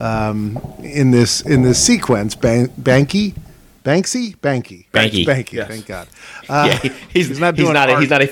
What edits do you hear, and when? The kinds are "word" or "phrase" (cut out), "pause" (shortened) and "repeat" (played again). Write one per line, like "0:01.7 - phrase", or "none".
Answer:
none

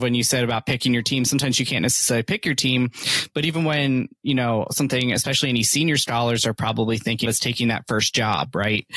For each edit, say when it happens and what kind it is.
0:07.3 - word

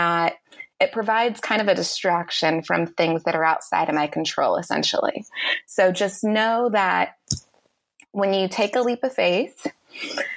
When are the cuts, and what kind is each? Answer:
none

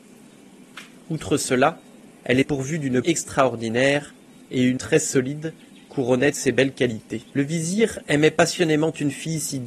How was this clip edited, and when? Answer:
0:02.4 - word
0:03.0 - word
0:04.8 - word
0:06.3 - word
0:07.3 - pause

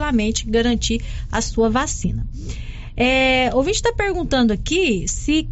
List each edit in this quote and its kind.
none

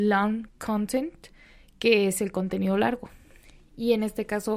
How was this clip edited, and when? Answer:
none

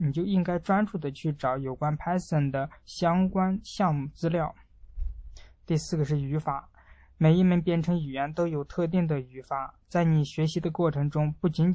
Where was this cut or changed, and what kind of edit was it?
none

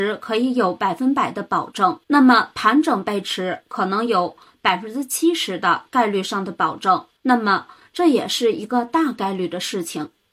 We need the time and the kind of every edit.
0:02.0 - pause
0:07.2 - pause

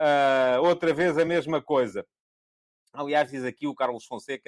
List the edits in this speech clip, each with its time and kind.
none

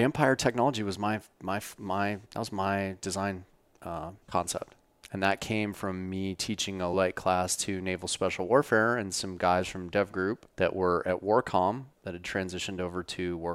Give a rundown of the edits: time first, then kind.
0:02.2 - pause
0:04.2 - pause
0:06.9 - word
0:10.5 - pause
0:11.9 - pause

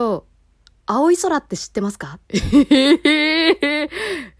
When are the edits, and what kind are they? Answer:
0:02.2 - pause

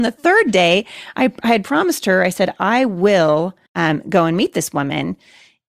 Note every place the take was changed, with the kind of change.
0:03.7 - pause

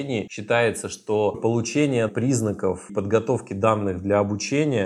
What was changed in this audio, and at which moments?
0:01.3 - word
0:02.1 - phrase
0:02.9 - word

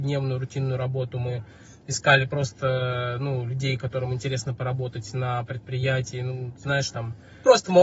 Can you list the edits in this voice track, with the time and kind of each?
none

